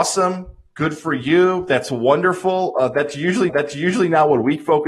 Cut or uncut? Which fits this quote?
cut